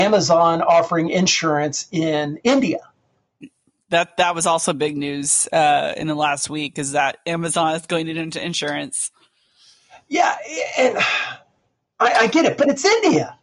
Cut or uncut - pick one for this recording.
uncut